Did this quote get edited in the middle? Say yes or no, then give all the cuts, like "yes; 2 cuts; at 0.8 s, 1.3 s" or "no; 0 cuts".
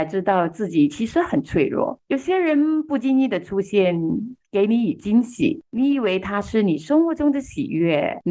no; 0 cuts